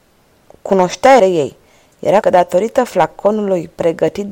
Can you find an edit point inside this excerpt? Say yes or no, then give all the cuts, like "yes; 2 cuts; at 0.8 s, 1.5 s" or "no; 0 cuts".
yes; 2 cuts; at 1.2 s, 2.2 s